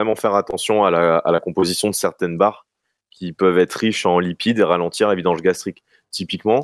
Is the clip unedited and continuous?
yes; 0 cuts

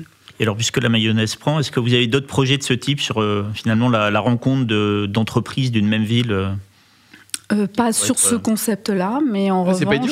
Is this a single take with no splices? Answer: yes; 0 cuts

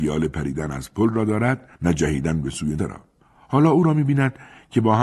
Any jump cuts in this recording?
yes; 3 cuts; at 1.7 s, 2.8 s, 3.2 s

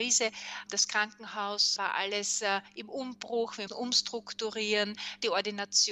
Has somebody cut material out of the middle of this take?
yes; 2 cuts; at 1.8 s, 3.7 s

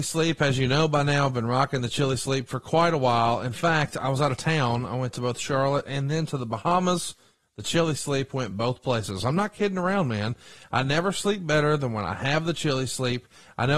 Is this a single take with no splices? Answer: yes; 0 cuts

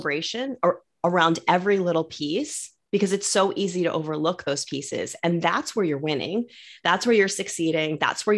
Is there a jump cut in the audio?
no; 0 cuts

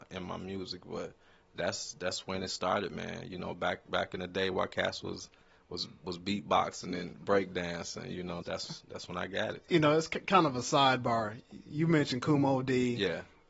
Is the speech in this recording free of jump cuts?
no; 1 cut; at 8.4 s

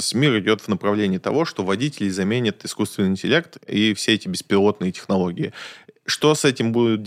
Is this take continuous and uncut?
yes; 0 cuts

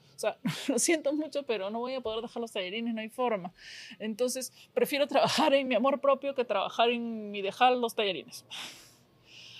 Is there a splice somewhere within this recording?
no; 0 cuts

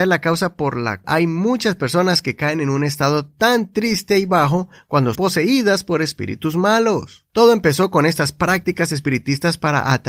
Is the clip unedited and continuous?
no; 3 cuts; at 1.0 s, 5.1 s, 7.3 s

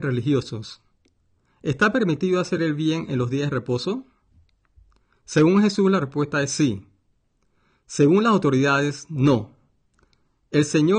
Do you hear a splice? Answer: no; 0 cuts

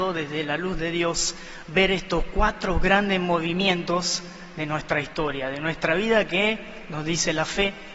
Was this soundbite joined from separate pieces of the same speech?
no; 0 cuts

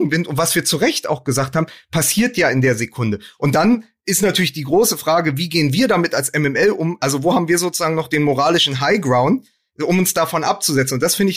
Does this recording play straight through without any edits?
yes; 0 cuts

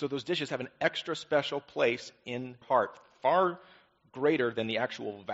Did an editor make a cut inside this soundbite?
yes; 1 cut; at 2.6 s

